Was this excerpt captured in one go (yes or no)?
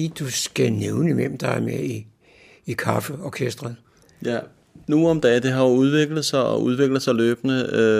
yes